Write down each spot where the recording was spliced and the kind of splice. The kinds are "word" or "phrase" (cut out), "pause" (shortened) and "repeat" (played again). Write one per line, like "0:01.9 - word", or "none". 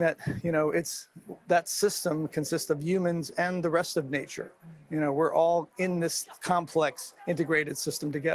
0:01.4 - pause
0:07.2 - pause